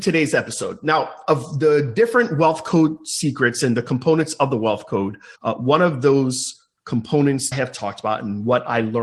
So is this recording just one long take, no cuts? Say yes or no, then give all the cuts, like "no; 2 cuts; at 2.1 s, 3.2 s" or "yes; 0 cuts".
no; 2 cuts; at 5.4 s, 7.5 s